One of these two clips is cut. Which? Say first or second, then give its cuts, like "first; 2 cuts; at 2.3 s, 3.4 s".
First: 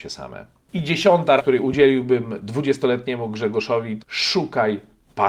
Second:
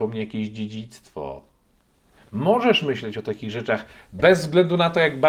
first; 2 cuts; at 1.4 s, 4.0 s